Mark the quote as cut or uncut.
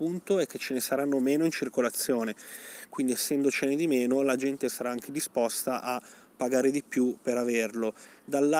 uncut